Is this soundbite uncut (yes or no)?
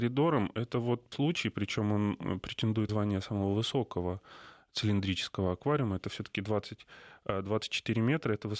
no